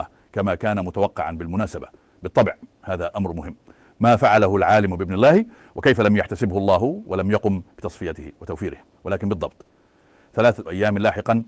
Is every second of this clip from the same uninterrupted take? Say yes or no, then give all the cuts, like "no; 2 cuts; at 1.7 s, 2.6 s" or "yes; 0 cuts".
yes; 0 cuts